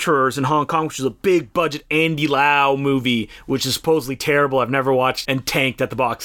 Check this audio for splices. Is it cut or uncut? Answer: cut